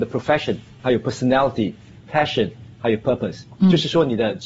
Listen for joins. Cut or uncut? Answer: uncut